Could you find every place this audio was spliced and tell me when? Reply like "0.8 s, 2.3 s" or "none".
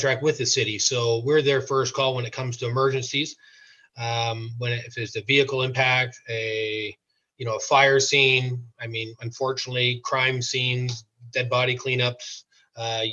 none